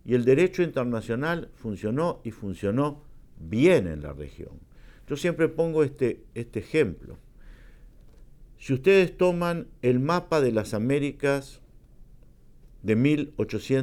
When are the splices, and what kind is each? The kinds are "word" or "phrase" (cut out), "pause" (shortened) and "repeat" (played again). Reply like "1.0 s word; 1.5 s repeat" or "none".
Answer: none